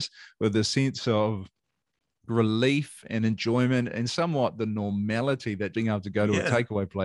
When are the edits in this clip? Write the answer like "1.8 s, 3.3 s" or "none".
5.7 s